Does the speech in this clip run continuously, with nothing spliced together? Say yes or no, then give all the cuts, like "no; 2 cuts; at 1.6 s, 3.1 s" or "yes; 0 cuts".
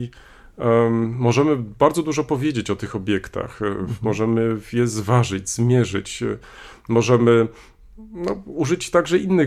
yes; 0 cuts